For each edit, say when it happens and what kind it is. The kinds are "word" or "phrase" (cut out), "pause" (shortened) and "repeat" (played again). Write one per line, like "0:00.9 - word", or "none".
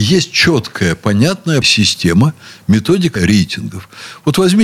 0:01.6 - word
0:03.2 - word